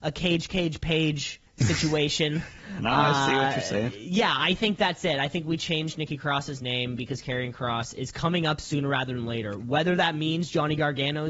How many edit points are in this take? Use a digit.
1